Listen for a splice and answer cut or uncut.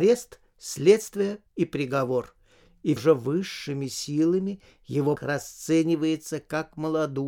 cut